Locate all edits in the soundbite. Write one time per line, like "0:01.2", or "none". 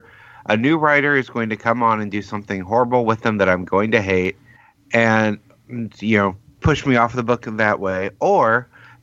0:04.6
0:06.5